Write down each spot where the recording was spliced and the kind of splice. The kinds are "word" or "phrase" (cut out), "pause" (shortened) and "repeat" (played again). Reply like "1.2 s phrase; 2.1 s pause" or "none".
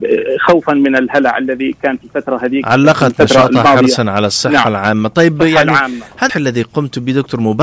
6.3 s word